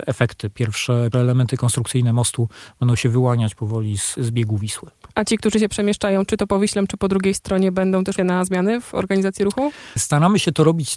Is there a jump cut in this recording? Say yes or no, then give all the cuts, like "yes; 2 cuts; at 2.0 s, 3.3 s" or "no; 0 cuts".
yes; 3 cuts; at 1.1 s, 4.2 s, 8.2 s